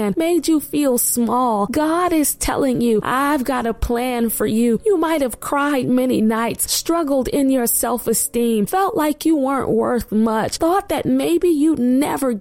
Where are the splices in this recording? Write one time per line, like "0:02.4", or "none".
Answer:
none